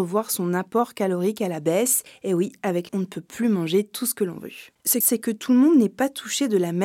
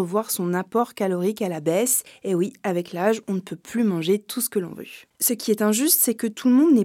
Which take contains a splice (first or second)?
first